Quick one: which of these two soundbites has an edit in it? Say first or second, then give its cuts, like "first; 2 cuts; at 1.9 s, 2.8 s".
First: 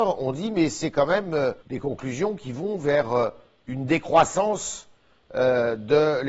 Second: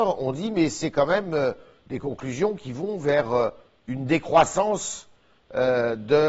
first; 1 cut; at 1.6 s